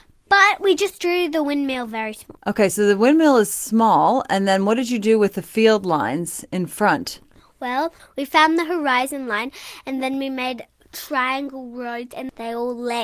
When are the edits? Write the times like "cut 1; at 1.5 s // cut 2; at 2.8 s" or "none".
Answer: none